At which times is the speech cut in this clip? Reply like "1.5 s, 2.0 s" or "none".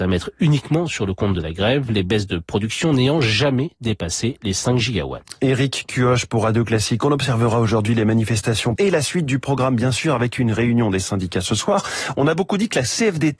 8.8 s

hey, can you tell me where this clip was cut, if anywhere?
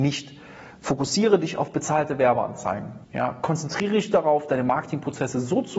3.0 s

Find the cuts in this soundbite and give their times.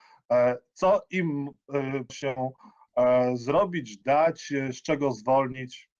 2.1 s

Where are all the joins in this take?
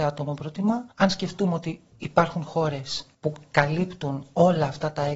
0.9 s, 3.1 s

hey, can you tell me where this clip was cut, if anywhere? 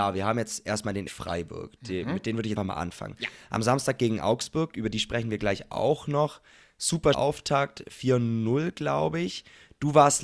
1.1 s, 2.6 s, 7.1 s

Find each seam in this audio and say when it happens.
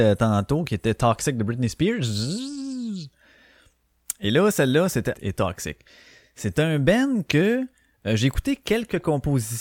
5.1 s

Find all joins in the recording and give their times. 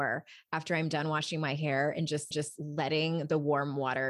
2.3 s

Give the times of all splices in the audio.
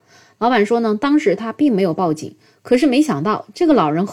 none

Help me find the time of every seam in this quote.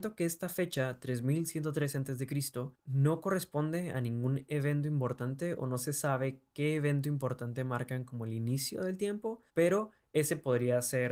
2.7 s, 9.5 s

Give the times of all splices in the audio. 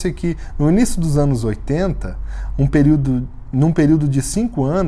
none

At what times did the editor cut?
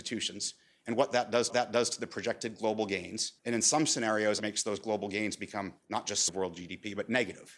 1.5 s, 3.4 s, 4.4 s, 5.8 s, 6.3 s

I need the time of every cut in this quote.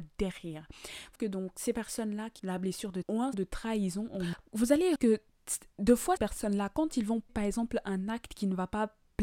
1.1 s, 2.4 s, 3.0 s, 3.3 s, 5.0 s, 6.2 s, 7.3 s

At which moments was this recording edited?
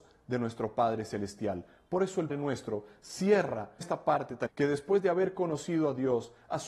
2.3 s, 3.8 s, 4.5 s

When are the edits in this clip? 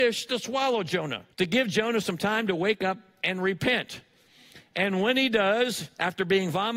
1.3 s

